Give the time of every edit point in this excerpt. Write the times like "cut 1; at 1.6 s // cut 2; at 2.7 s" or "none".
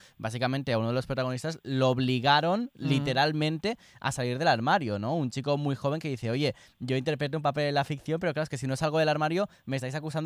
none